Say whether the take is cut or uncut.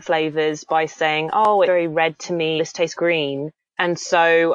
cut